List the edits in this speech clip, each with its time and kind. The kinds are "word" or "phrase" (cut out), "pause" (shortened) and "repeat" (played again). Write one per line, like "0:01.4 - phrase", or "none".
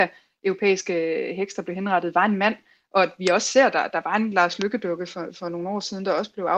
none